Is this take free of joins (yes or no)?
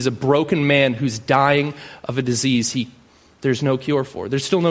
yes